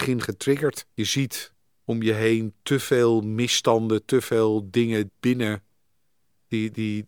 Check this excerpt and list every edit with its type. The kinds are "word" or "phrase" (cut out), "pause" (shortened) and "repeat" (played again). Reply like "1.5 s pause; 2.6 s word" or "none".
0.9 s pause; 1.7 s pause; 5.1 s word